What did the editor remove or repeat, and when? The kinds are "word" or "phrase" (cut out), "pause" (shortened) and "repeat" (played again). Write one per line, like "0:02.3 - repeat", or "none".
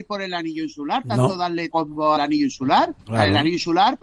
0:01.7 - word
0:02.2 - word